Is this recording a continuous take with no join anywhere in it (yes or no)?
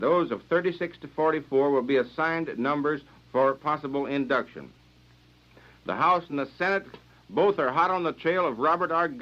yes